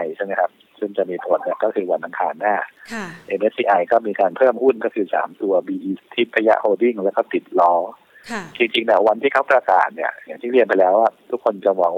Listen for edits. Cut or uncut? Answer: cut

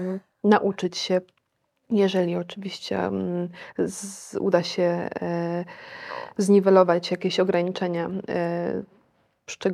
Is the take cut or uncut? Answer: uncut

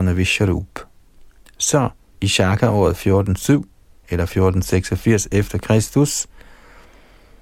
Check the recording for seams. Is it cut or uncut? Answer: uncut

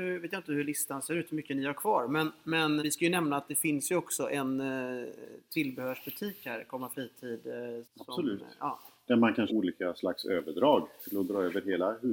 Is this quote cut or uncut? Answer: cut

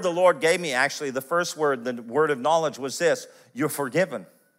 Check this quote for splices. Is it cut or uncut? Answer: uncut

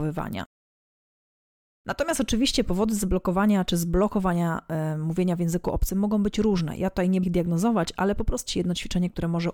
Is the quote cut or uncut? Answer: cut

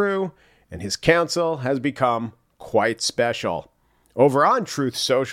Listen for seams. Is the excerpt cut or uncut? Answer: uncut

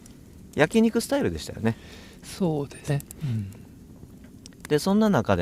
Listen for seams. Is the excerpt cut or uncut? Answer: cut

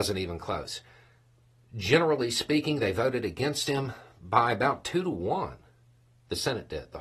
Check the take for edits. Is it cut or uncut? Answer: uncut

